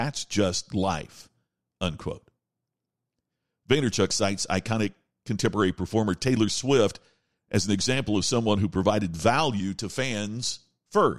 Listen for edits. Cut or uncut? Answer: uncut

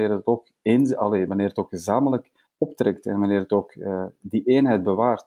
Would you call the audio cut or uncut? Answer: cut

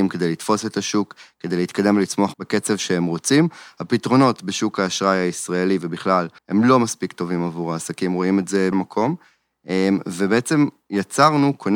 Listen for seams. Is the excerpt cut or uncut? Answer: cut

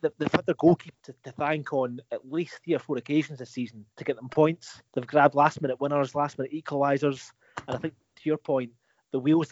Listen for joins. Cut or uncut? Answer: cut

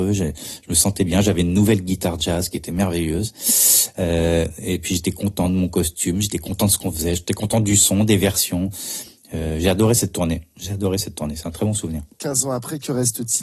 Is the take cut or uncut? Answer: cut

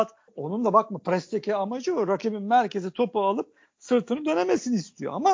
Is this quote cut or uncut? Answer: uncut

